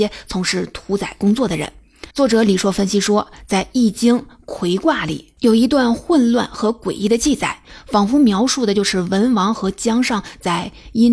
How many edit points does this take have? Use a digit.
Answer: 2